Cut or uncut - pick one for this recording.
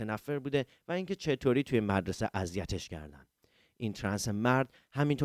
uncut